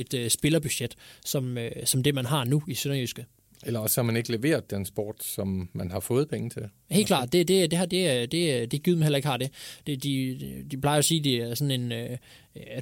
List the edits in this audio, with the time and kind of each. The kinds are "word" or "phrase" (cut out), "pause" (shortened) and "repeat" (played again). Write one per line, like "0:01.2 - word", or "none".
none

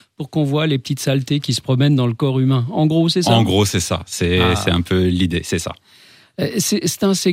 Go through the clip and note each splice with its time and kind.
none

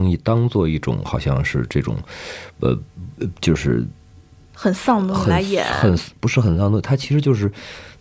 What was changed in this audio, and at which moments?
none

